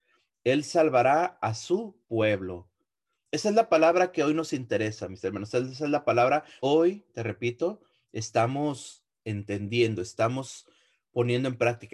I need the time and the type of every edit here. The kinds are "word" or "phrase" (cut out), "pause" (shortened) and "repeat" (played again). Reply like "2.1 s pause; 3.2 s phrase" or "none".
6.6 s word